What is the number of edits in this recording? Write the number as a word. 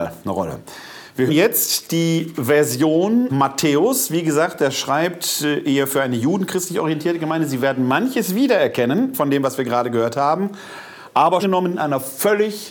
three